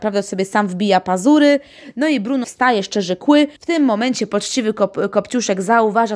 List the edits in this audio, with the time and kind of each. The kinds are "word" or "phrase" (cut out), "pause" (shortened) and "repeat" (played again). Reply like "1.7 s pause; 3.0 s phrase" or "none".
2.4 s word; 3.6 s pause